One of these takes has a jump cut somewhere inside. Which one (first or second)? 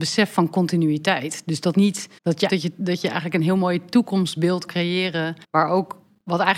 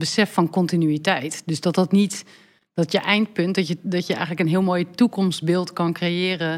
first